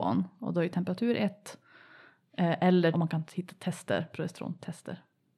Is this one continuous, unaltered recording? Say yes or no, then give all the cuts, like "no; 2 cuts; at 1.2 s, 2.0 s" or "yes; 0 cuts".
no; 1 cut; at 2.9 s